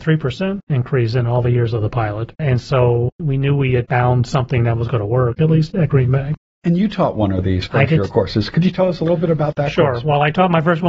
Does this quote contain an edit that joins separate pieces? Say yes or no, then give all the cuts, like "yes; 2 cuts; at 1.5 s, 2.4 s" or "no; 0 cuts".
no; 0 cuts